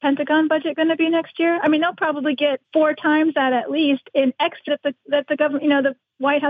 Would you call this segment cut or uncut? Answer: cut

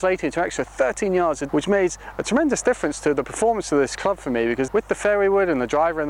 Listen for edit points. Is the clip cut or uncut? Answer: cut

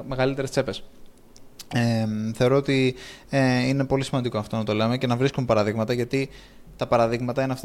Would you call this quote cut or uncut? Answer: uncut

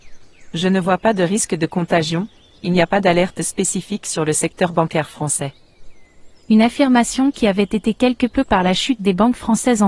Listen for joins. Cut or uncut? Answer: cut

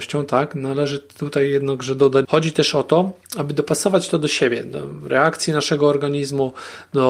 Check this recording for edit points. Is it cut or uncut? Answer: cut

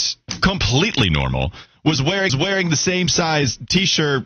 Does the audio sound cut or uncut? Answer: cut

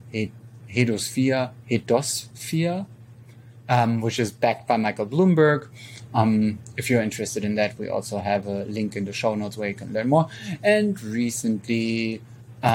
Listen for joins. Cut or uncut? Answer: uncut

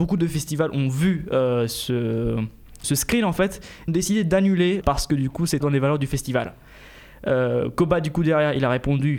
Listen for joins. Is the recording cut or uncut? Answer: cut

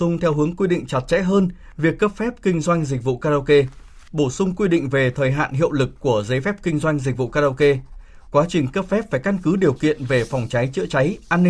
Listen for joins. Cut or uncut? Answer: uncut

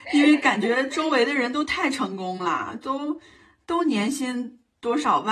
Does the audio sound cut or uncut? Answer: uncut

